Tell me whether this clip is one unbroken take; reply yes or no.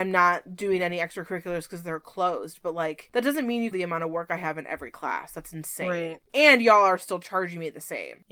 no